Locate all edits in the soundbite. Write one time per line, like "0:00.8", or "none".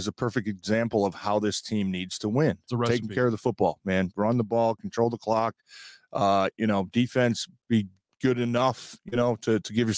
none